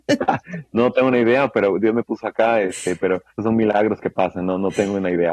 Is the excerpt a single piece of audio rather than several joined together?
no; 1 cut; at 3.3 s

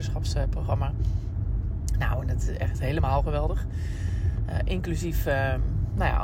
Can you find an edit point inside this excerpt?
no; 0 cuts

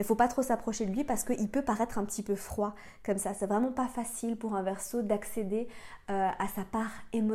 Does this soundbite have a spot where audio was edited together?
no; 0 cuts

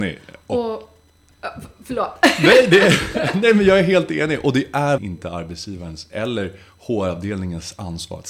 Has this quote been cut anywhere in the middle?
yes; 1 cut; at 5.0 s

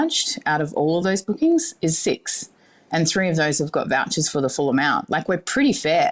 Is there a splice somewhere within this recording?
no; 0 cuts

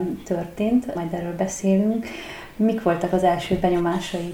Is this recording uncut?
yes; 0 cuts

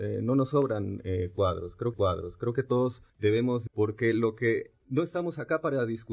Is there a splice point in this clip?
yes; 4 cuts; at 1.9 s, 3.1 s, 3.7 s, 4.8 s

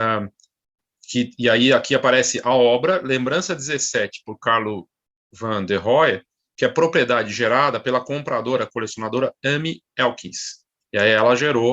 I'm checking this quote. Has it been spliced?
no; 0 cuts

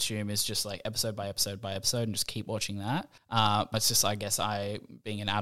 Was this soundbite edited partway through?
yes; 2 cuts; at 3.2 s, 3.7 s

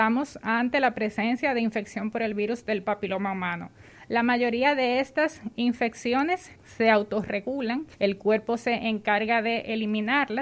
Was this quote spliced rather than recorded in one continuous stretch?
yes; 2 cuts; at 6.6 s, 7.9 s

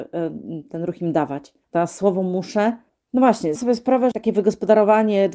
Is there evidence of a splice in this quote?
yes; 4 cuts; at 1.6 s, 2.9 s, 3.6 s, 4.1 s

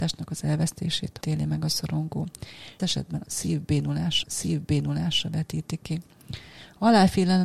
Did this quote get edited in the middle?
yes; 3 cuts; at 1.2 s, 2.8 s, 4.2 s

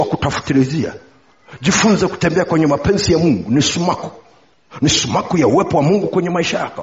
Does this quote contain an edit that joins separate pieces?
no; 0 cuts

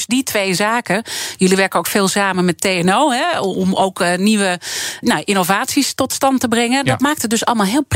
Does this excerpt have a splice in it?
yes; 1 cut; at 5.0 s

